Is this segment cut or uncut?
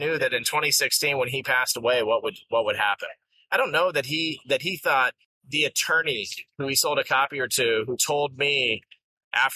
uncut